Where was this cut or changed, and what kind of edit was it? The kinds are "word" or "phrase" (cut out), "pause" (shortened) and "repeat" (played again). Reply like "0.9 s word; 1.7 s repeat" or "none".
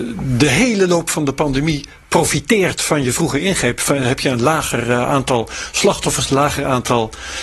none